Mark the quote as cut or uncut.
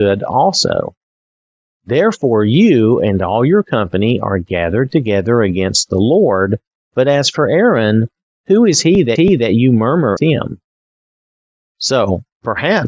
cut